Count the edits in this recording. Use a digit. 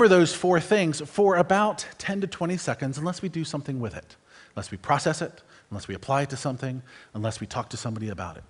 0